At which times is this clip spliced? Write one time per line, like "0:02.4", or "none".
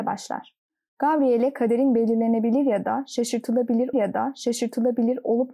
0:03.9